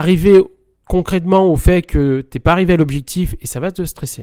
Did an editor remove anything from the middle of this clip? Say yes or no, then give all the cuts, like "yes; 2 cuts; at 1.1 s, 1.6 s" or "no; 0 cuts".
no; 0 cuts